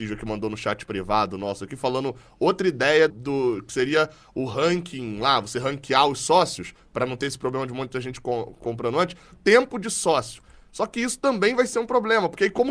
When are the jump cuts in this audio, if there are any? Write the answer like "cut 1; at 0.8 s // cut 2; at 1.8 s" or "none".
cut 1; at 3.1 s // cut 2; at 9.3 s